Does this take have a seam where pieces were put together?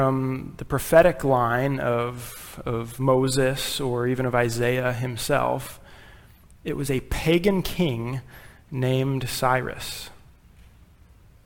no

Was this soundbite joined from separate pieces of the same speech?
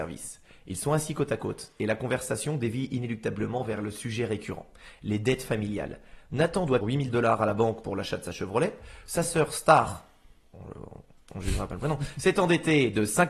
yes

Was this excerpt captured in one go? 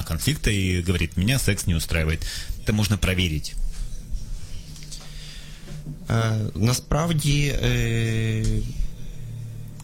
no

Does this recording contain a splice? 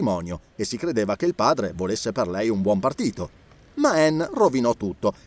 no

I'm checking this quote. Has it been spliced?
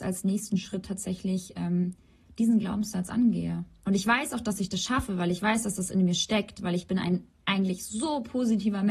no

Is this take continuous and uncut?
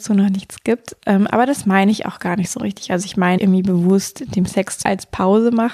no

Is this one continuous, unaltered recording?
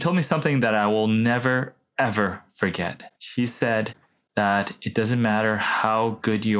no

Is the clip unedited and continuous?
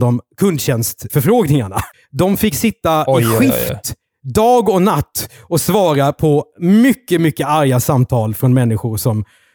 no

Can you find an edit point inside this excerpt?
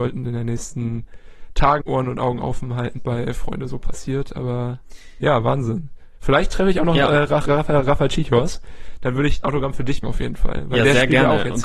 yes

